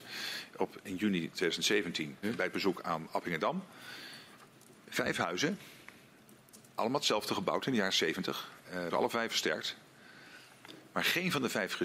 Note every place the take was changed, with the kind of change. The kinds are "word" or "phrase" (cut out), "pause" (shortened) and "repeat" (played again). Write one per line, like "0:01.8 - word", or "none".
0:02.2 - word
0:04.4 - pause
0:08.9 - word
0:09.3 - word